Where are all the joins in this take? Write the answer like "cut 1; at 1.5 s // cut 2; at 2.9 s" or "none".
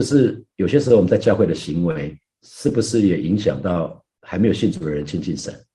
cut 1; at 2.2 s